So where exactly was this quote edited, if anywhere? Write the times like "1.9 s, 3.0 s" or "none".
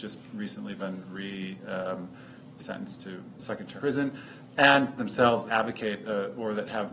2.6 s, 3.4 s, 3.8 s, 5.0 s, 5.5 s